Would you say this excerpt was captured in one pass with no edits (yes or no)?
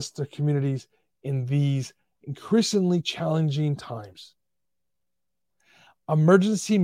yes